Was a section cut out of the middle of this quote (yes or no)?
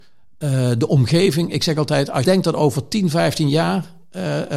yes